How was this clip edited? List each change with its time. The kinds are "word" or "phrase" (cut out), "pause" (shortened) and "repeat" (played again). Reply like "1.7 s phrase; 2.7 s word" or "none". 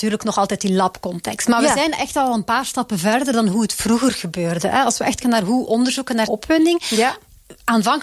5.2 s word; 6.3 s word